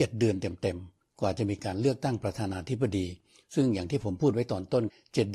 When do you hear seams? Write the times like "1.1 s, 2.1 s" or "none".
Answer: none